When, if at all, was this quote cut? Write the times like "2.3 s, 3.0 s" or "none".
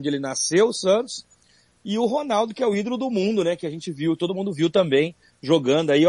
none